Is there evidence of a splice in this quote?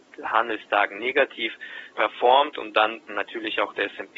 yes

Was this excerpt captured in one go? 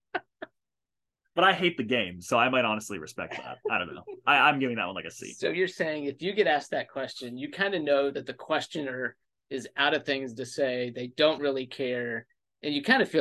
yes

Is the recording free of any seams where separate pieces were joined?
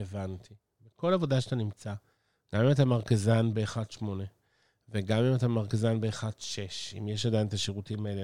yes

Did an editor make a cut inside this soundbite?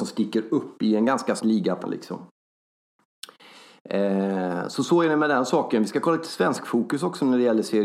yes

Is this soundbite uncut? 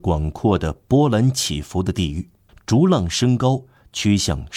no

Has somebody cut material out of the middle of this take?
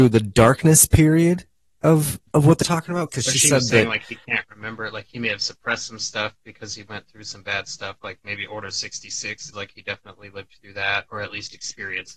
yes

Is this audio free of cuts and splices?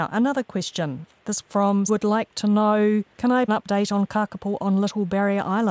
no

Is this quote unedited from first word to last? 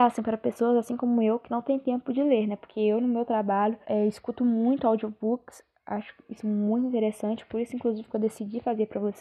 no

